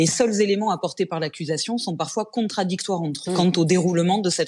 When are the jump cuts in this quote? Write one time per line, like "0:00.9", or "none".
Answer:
0:03.2